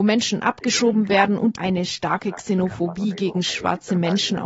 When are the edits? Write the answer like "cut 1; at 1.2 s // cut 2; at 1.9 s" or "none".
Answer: cut 1; at 1.5 s